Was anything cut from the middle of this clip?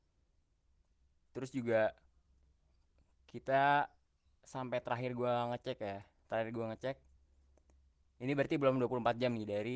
no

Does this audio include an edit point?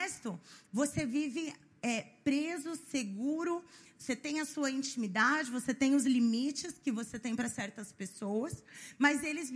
no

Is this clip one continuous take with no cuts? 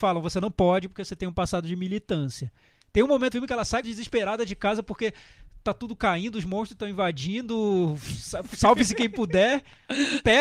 no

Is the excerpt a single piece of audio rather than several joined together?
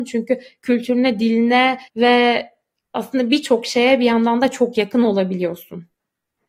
no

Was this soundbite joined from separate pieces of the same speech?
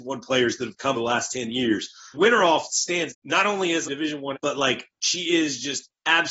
yes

